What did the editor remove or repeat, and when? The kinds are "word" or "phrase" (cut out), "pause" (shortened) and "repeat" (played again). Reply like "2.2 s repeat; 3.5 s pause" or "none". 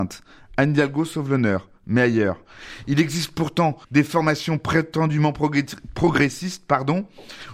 3.8 s pause

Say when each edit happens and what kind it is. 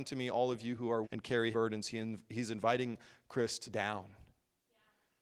1.0 s word; 1.5 s word; 3.7 s word

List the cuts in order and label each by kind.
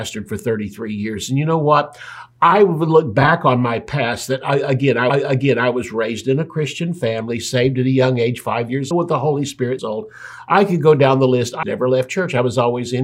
5.1 s repeat; 8.9 s phrase; 9.8 s phrase; 11.6 s word

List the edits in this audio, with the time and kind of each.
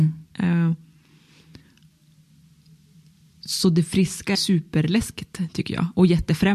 4.4 s word

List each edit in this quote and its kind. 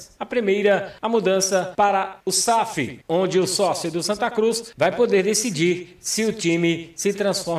none

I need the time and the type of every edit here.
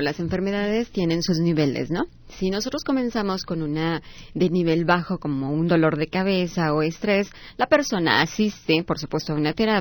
none

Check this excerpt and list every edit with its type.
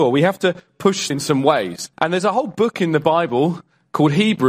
1.1 s word; 1.9 s pause

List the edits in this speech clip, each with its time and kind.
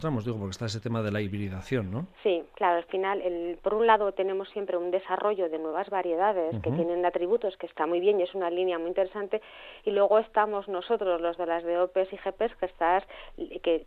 2.1 s pause

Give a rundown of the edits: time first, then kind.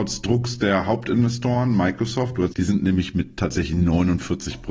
2.5 s phrase

